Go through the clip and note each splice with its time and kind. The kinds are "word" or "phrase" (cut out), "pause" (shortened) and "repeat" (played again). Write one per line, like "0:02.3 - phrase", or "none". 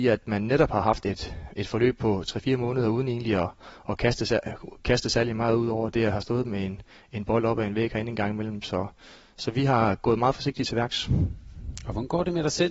none